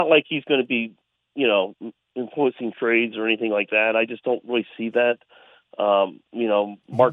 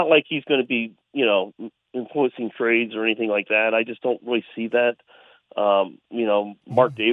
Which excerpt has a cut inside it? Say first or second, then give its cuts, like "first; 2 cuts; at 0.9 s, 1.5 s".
second; 1 cut; at 1.0 s